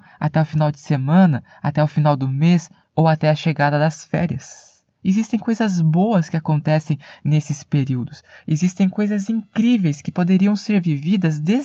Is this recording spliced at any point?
no; 0 cuts

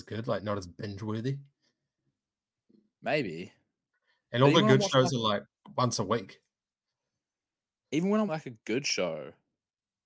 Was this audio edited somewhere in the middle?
yes; 1 cut; at 8.3 s

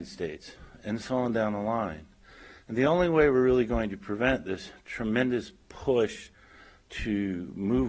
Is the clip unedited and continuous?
yes; 0 cuts

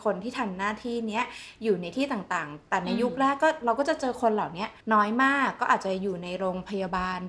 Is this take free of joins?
no; 1 cut; at 4.8 s

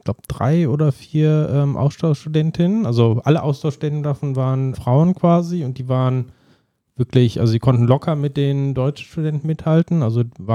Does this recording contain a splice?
yes; 1 cut; at 4.7 s

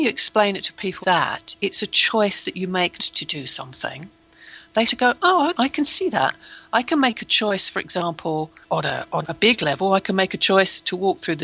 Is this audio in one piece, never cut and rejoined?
no; 6 cuts; at 1.0 s, 3.0 s, 4.9 s, 5.5 s, 8.6 s, 9.2 s

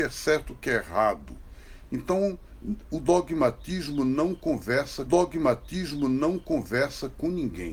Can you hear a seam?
yes; 1 cut; at 5.1 s

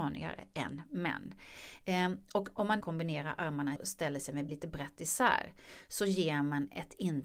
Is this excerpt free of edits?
no; 3 cuts; at 2.8 s, 3.8 s, 4.5 s

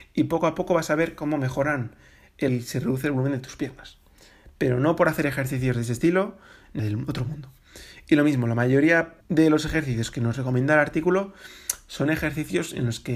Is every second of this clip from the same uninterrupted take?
no; 3 cuts; at 2.5 s, 6.8 s, 9.2 s

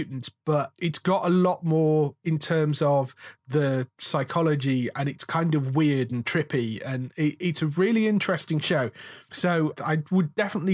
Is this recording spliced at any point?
no; 0 cuts

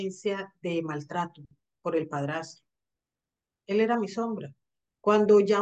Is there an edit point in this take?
no; 0 cuts

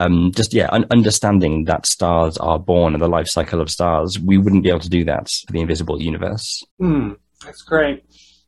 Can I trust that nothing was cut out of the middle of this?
no; 2 cuts; at 5.5 s, 6.7 s

